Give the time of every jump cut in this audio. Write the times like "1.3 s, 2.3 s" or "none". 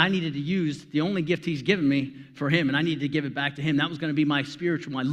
none